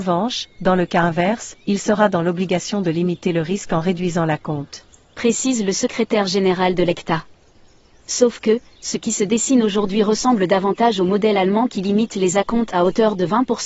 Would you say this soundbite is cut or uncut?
uncut